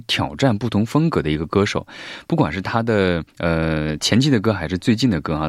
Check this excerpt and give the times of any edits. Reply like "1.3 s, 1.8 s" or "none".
3.3 s